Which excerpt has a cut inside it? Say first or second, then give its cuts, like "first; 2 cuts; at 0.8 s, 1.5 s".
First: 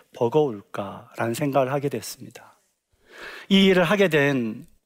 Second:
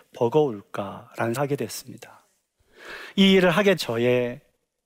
second; 2 cuts; at 1.4 s, 3.8 s